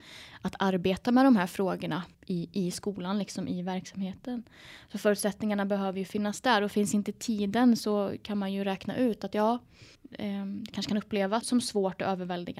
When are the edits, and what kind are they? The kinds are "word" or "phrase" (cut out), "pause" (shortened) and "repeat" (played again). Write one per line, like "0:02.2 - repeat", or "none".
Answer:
0:02.1 - word
0:09.9 - pause
0:11.4 - word